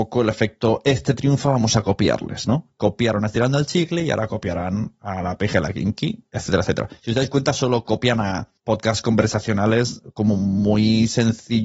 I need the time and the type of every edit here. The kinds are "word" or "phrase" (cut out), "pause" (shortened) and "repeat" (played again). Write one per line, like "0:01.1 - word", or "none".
0:08.6 - pause